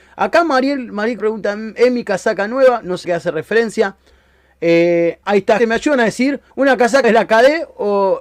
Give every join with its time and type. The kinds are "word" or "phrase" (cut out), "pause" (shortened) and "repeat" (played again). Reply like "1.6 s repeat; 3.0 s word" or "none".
1.2 s word; 3.0 s word; 5.2 s word; 5.6 s word; 6.5 s pause; 7.0 s word